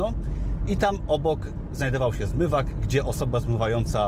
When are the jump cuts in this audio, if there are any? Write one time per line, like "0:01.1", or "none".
none